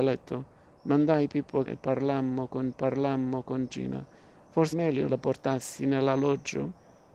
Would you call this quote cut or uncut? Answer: cut